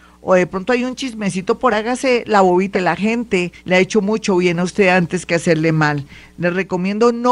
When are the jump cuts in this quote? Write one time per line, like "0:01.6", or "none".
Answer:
0:01.7
0:02.7
0:03.6